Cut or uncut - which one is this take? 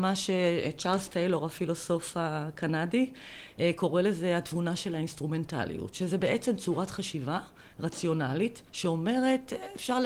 cut